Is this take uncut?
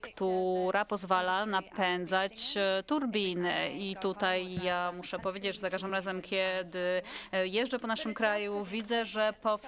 yes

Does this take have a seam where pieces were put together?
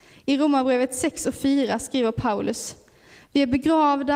no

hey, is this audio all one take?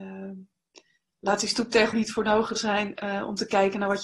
no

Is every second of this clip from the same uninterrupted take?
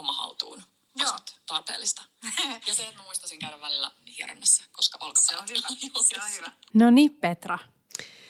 yes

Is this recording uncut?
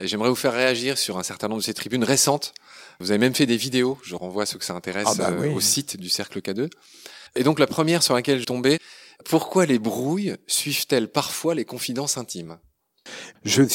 no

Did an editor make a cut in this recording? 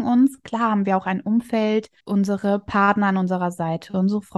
yes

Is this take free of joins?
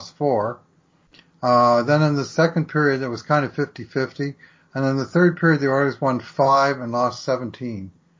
yes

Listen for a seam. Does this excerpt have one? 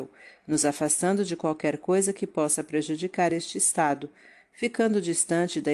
no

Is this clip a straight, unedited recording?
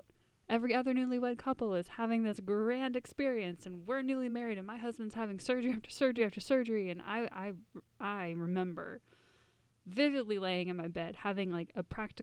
yes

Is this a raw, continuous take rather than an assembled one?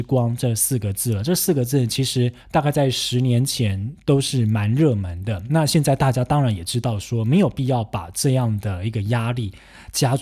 no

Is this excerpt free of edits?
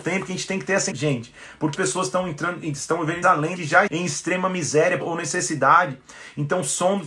no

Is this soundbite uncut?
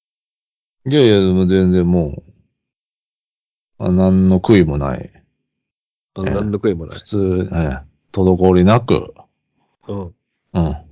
yes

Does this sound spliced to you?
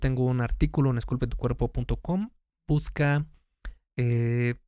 no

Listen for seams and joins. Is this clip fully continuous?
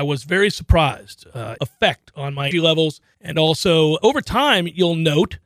no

